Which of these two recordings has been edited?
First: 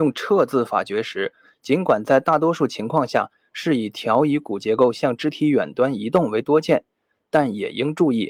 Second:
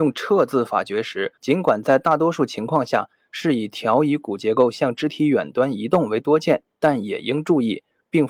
second; 2 cuts; at 1.4 s, 6.7 s

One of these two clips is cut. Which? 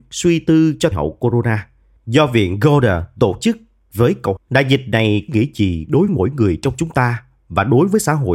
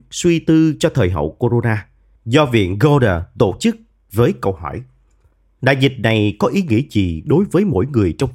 first; 4 cuts; at 0.9 s, 4.4 s, 5.3 s, 6.1 s

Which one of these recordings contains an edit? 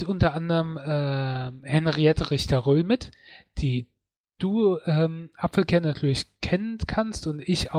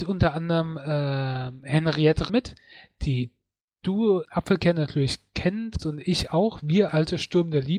second; 4 cuts; at 2.3 s, 4.2 s, 5.8 s, 6.9 s

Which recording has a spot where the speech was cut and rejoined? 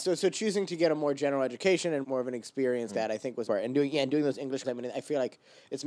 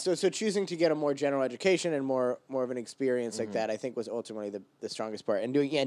first; 4 cuts; at 2.0 s, 2.9 s, 3.4 s, 4.6 s

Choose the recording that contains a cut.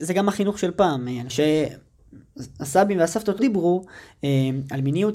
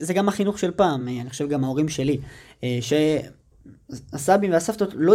first; 2 cuts; at 1.3 s, 3.4 s

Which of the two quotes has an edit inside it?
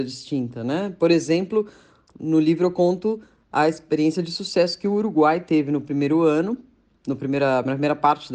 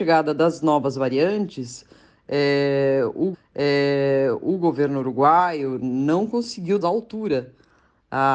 second; 2 cuts; at 3.3 s, 6.8 s

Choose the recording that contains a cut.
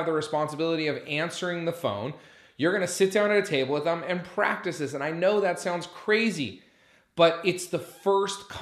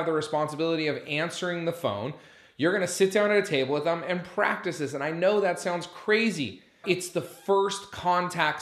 second; 1 cut; at 6.8 s

